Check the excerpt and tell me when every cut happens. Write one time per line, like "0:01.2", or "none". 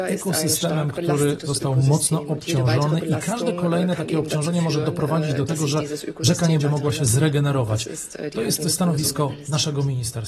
0:06.6